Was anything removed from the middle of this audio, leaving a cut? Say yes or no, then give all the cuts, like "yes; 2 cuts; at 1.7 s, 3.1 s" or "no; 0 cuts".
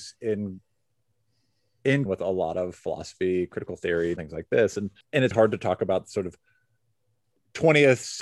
yes; 4 cuts; at 2.1 s, 4.2 s, 5.0 s, 5.3 s